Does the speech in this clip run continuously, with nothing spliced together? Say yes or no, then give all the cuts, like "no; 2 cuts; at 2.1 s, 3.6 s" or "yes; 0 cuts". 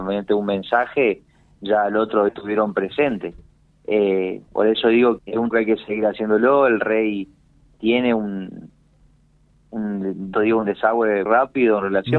no; 6 cuts; at 2.3 s, 4.5 s, 5.2 s, 5.5 s, 10.3 s, 11.3 s